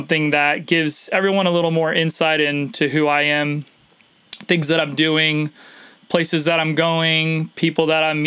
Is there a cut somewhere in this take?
no; 0 cuts

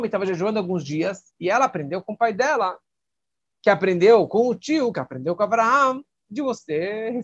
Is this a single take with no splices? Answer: yes; 0 cuts

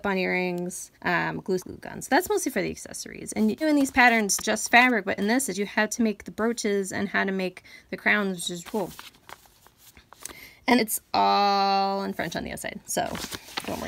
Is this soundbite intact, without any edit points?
no; 7 cuts; at 0.9 s, 1.6 s, 3.6 s, 4.4 s, 5.5 s, 8.6 s, 10.8 s

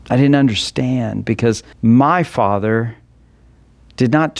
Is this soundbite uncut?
no; 1 cut; at 1.7 s

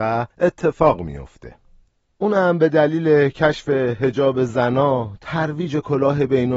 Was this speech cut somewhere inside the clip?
no; 0 cuts

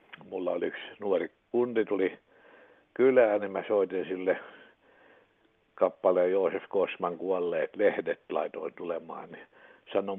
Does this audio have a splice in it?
no; 0 cuts

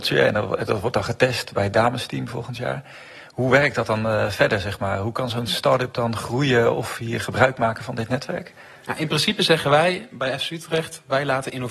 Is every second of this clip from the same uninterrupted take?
yes; 0 cuts

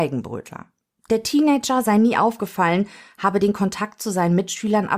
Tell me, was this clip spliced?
no; 0 cuts

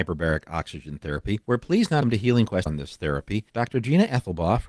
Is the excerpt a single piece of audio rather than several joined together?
no; 4 cuts; at 1.4 s, 2.0 s, 2.7 s, 3.5 s

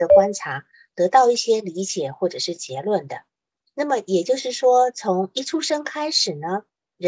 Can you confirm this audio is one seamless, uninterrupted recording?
yes; 0 cuts

